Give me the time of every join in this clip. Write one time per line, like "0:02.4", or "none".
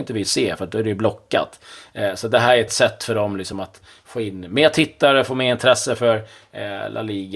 none